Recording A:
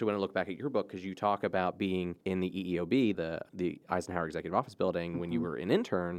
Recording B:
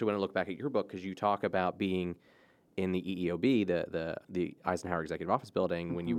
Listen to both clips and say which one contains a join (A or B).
A